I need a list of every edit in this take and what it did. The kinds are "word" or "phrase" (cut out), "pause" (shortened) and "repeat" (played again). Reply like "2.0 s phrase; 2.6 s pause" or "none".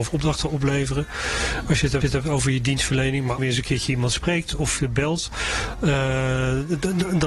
2.0 s repeat; 3.4 s phrase